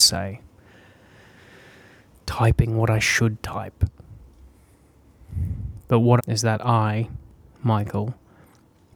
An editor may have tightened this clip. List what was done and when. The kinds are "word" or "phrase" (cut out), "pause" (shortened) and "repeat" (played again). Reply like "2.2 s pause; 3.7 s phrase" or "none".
6.2 s phrase